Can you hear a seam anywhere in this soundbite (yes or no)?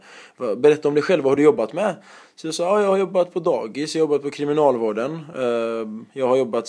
no